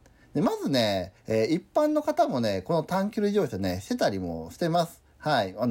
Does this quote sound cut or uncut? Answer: cut